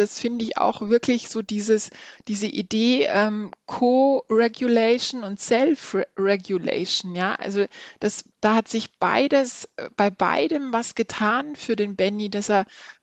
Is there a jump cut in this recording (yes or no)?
yes